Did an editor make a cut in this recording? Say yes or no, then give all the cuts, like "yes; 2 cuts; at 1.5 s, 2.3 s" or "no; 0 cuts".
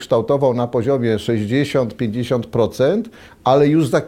no; 0 cuts